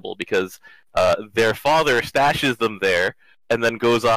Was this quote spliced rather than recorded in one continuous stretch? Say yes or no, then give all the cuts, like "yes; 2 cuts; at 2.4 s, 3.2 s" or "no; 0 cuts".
no; 0 cuts